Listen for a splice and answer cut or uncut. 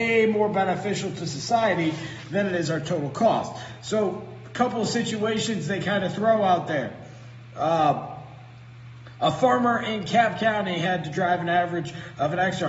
uncut